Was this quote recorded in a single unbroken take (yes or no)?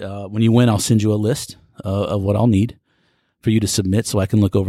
yes